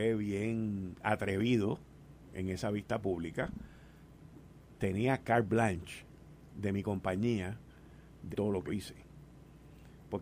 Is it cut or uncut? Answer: cut